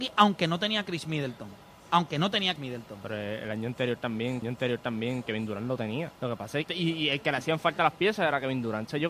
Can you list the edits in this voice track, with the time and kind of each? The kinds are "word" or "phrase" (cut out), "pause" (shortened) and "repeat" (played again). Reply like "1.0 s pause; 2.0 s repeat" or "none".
2.6 s word; 4.4 s repeat; 6.1 s pause; 6.7 s word

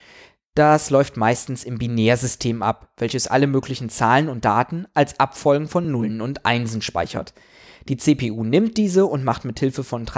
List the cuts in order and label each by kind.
none

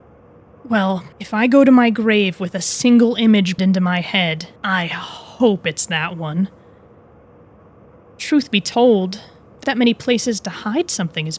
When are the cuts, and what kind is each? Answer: 1.1 s pause; 3.6 s word; 4.6 s pause; 9.6 s word

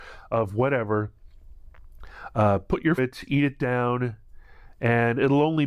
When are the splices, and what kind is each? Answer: 3.0 s phrase

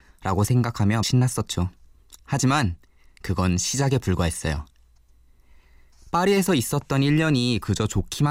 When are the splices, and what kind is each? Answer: 1.0 s word

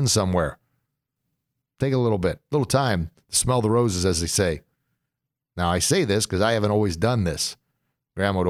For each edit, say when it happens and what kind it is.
none

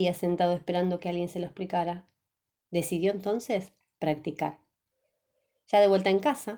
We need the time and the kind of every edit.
none

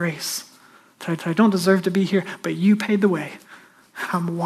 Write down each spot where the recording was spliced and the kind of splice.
1.2 s repeat

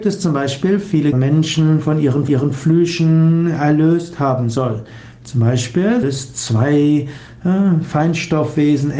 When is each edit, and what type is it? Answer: 1.1 s phrase; 2.3 s repeat; 6.0 s word

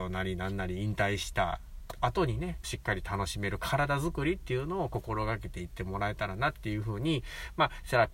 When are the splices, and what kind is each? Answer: 2.6 s phrase

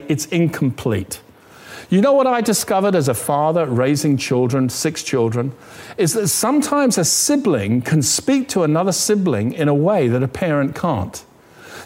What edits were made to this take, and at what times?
none

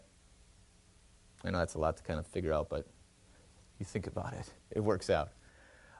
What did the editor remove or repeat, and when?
3.3 s pause; 4.6 s pause

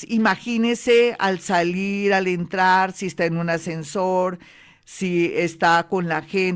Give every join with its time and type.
none

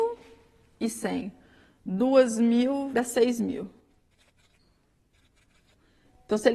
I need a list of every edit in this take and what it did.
2.9 s word

